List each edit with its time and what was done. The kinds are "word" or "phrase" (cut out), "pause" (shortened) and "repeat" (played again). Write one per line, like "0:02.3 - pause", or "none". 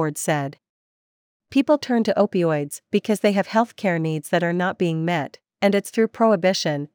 none

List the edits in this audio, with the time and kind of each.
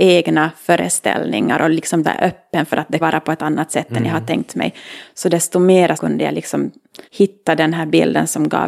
0:02.0 - phrase
0:03.0 - word
0:03.4 - word
0:06.0 - word
0:07.0 - pause

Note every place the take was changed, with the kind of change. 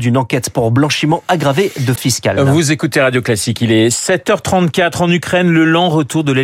0:02.0 - word

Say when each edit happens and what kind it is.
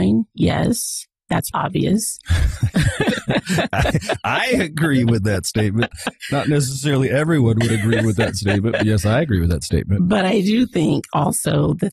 0:01.5 - word

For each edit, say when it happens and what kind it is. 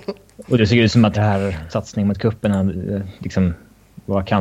0:01.1 - word
0:01.7 - word

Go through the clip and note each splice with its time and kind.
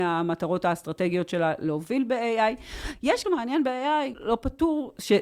0:03.2 - phrase
0:04.1 - word

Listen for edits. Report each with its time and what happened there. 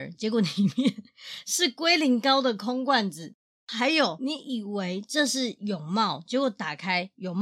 0:03.5 - pause

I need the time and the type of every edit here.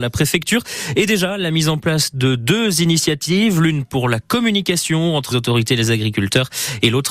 0:05.3 - word

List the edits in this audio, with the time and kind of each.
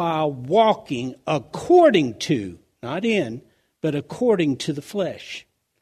none

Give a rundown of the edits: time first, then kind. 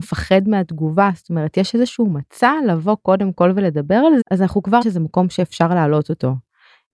0:04.2 - word
0:04.8 - word

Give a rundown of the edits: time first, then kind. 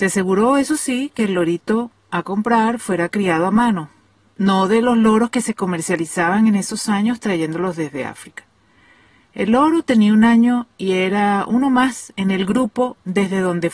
none

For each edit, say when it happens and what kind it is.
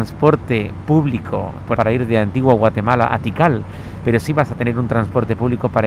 0:01.8 - word

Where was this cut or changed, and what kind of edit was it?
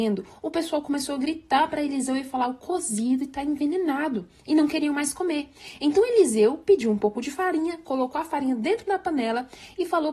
none

